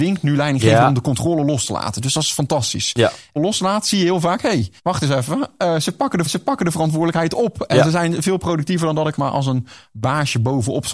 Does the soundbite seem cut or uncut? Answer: cut